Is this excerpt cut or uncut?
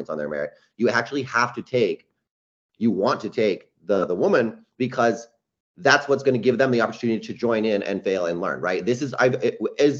uncut